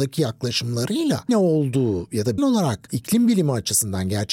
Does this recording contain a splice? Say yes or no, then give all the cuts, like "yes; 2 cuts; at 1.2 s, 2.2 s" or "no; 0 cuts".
yes; 2 cuts; at 1.3 s, 2.4 s